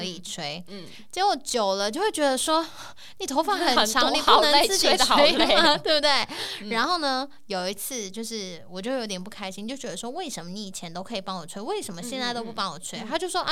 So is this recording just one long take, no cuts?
yes; 0 cuts

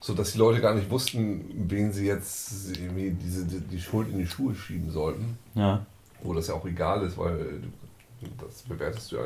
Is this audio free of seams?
yes; 0 cuts

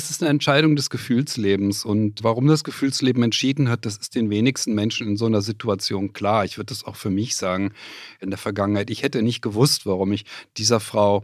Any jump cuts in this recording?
no; 0 cuts

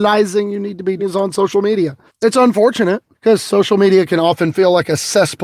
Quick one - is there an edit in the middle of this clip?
yes; 3 cuts; at 1.0 s, 2.1 s, 3.1 s

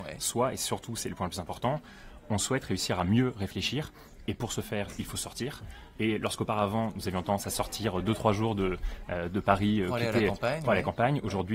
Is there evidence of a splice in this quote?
no; 0 cuts

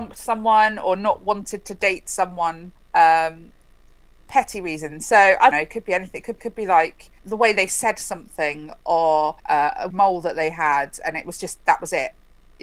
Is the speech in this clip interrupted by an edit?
yes; 6 cuts; at 2.8 s, 5.5 s, 6.4 s, 7.2 s, 9.4 s, 9.9 s

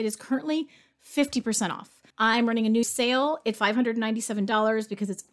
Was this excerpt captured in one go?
no; 3 cuts; at 2.1 s, 2.8 s, 3.5 s

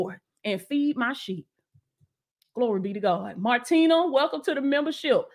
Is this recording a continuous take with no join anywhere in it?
yes; 0 cuts

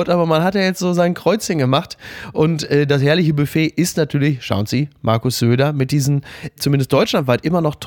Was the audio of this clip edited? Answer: no; 0 cuts

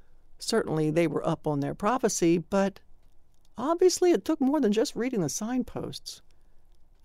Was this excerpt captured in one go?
yes; 0 cuts

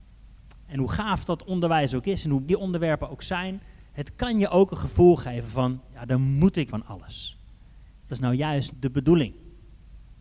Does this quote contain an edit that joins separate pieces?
yes; 4 cuts; at 2.5 s, 6.7 s, 8.1 s, 8.7 s

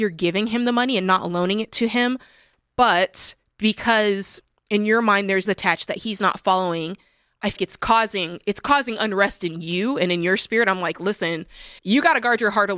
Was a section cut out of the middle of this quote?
yes; 3 cuts; at 5.4 s, 7.6 s, 11.8 s

